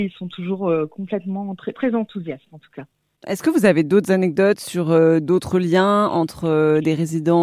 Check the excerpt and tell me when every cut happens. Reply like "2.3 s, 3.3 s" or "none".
1.7 s